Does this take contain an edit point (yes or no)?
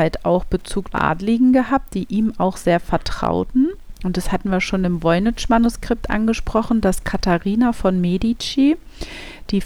yes